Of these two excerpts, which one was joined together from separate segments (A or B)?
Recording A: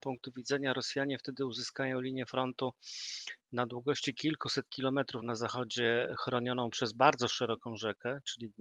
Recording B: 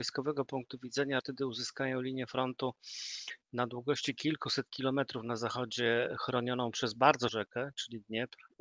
B